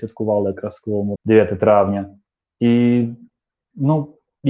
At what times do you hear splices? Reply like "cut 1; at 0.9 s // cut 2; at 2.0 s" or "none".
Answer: cut 1; at 1.1 s